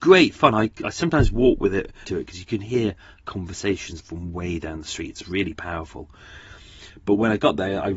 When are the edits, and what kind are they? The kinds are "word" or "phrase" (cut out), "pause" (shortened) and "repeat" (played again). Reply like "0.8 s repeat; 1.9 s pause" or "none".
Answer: 2.0 s phrase; 4.0 s word